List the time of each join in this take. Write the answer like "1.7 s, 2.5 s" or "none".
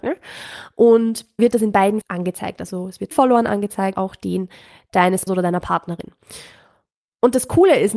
1.4 s, 2.0 s, 3.1 s, 3.9 s, 5.3 s